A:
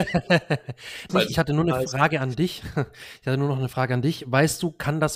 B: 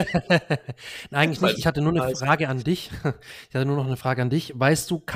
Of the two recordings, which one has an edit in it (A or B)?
A